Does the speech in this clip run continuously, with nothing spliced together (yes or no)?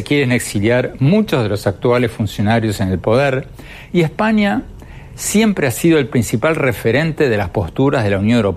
yes